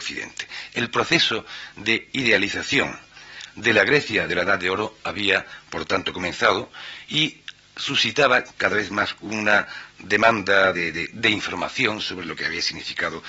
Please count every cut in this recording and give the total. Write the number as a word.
one